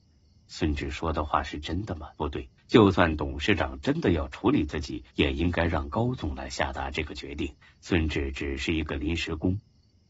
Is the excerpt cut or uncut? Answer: cut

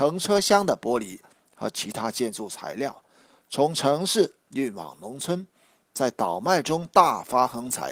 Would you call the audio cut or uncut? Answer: uncut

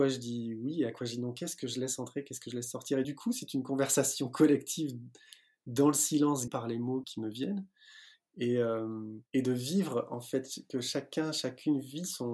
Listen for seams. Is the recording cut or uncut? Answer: cut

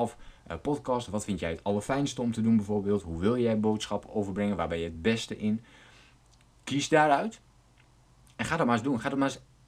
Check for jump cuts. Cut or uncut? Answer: uncut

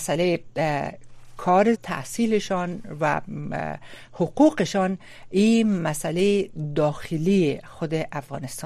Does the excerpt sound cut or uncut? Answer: cut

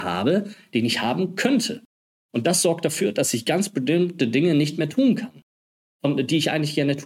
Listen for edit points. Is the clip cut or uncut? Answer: uncut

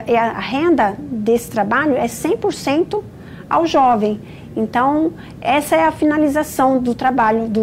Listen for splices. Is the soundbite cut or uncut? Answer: uncut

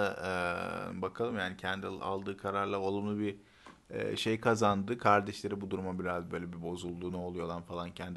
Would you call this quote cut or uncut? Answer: uncut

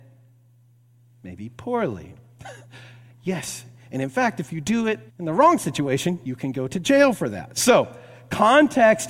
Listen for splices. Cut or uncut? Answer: cut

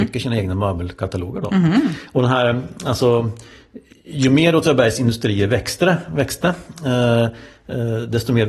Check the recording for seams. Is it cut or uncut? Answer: uncut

